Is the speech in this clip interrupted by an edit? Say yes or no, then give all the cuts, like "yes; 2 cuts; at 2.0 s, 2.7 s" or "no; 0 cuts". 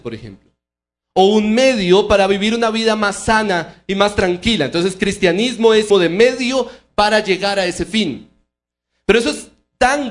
yes; 1 cut; at 5.9 s